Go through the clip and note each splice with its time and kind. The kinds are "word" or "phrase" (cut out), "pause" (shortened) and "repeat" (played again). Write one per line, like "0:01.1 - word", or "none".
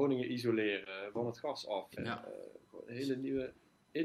0:02.0 - phrase